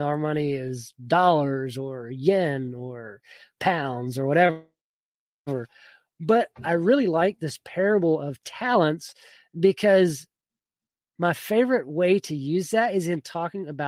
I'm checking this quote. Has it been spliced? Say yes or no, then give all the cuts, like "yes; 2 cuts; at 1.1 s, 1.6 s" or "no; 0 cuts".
no; 0 cuts